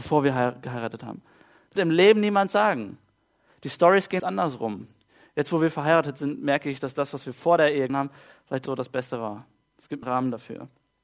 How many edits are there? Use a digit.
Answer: 5